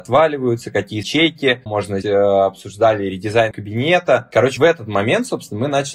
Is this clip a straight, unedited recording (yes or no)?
no